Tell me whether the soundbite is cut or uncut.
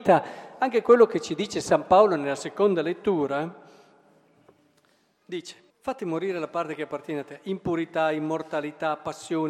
cut